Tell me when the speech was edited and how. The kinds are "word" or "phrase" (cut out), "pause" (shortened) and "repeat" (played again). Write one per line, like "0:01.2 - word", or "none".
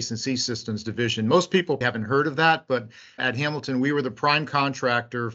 0:01.8 - word